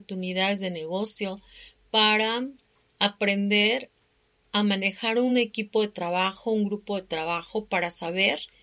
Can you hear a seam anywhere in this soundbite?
no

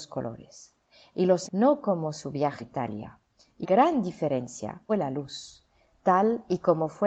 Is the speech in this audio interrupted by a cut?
yes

